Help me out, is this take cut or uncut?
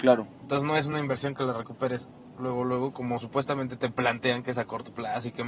uncut